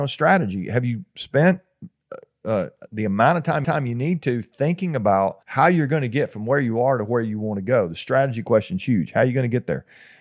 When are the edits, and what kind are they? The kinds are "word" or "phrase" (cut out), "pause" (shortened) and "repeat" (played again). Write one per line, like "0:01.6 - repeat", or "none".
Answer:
0:02.9 - word
0:03.6 - repeat
0:05.4 - pause